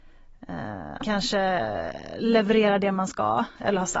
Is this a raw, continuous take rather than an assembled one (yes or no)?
no